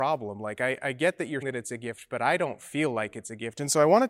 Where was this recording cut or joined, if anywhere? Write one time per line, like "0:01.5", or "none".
0:01.4

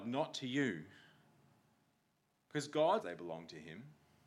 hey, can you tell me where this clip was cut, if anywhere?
0:03.0

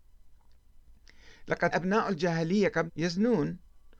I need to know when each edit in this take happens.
0:01.7
0:02.9

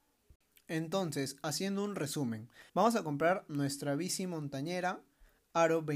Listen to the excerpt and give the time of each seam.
0:02.7

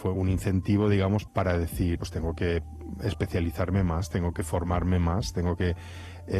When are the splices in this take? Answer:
0:01.3
0:02.0
0:04.3

